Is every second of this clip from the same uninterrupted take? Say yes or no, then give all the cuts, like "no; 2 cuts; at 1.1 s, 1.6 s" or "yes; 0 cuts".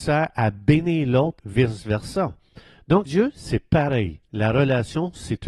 no; 2 cuts; at 1.4 s, 3.1 s